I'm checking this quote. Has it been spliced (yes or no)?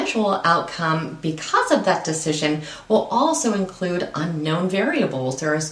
no